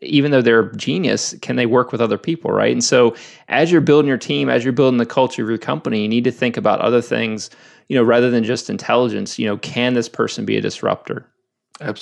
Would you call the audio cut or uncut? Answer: uncut